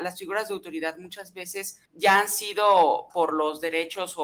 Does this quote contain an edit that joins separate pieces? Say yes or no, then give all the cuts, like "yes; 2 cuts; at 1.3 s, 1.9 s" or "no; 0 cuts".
yes; 2 cuts; at 1.8 s, 3.1 s